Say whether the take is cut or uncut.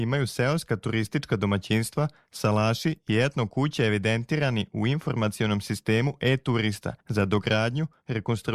cut